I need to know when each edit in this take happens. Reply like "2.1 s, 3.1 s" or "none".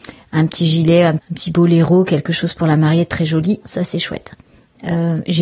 1.2 s, 3.6 s